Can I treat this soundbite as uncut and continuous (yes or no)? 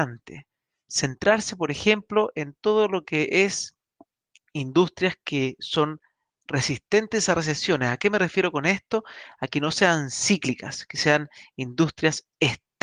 yes